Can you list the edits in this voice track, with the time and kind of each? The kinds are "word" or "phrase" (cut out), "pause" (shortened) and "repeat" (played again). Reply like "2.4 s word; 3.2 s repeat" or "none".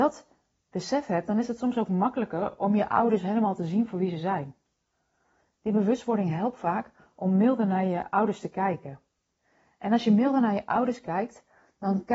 none